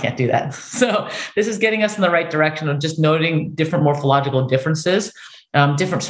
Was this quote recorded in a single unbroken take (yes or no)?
yes